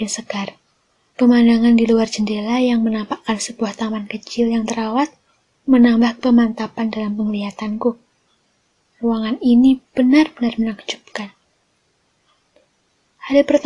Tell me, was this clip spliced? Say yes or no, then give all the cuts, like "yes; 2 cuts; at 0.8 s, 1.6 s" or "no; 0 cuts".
no; 0 cuts